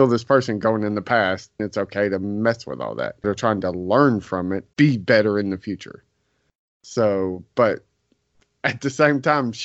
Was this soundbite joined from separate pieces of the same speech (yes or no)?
yes